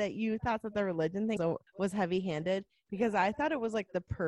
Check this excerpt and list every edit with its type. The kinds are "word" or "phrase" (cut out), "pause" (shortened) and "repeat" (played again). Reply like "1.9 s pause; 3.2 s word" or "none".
1.4 s word; 1.7 s pause